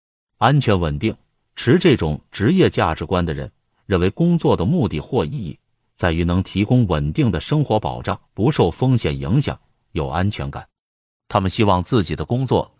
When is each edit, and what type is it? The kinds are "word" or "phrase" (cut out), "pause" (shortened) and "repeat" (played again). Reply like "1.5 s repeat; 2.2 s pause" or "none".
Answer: 8.3 s pause